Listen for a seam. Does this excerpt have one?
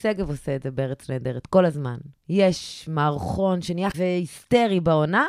yes; 2 cuts; at 2.2 s, 3.9 s

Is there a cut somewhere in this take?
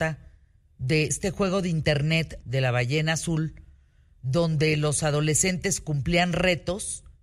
yes; 2 cuts; at 1.1 s, 2.4 s

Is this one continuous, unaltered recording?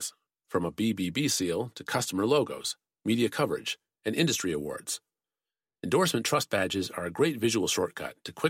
yes; 0 cuts

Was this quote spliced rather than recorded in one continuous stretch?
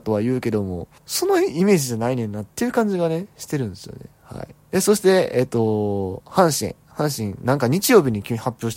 yes; 3 cuts; at 1.0 s, 2.5 s, 4.6 s

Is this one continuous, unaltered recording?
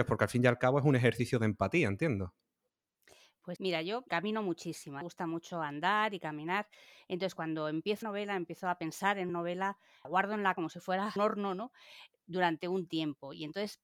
no; 8 cuts; at 3.6 s, 4.1 s, 5.0 s, 8.0 s, 9.3 s, 10.0 s, 10.5 s, 11.2 s

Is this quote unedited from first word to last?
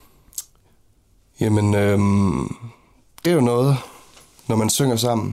no; 1 cut; at 3.2 s

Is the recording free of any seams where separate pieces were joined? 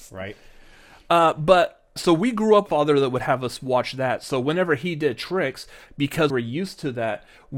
no; 3 cuts; at 2.0 s, 2.7 s, 6.3 s

